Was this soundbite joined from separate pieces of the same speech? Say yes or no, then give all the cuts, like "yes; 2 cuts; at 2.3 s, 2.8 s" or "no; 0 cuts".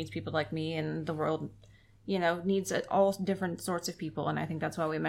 no; 0 cuts